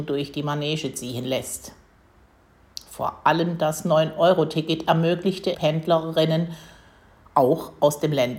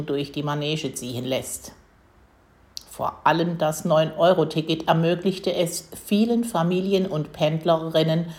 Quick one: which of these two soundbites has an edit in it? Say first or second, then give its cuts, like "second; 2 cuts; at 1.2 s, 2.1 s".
first; 1 cut; at 5.5 s